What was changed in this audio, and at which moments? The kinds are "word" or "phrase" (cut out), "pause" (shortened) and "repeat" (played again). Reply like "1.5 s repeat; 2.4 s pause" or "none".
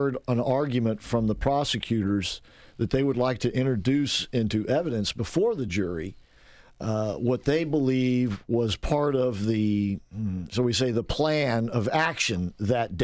none